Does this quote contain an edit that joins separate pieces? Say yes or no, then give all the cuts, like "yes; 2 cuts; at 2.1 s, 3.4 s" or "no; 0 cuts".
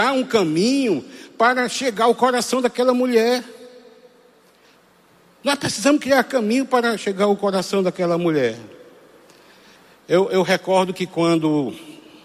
no; 0 cuts